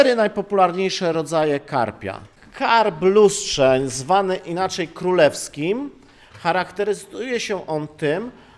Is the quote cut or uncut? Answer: uncut